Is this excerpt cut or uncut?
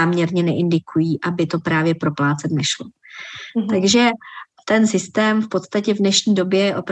uncut